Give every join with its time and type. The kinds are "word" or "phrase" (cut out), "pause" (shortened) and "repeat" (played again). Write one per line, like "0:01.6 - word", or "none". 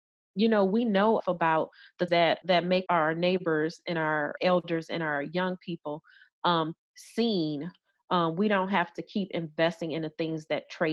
0:01.2 - word
0:02.1 - word
0:02.4 - word
0:02.9 - word
0:04.4 - word
0:06.8 - word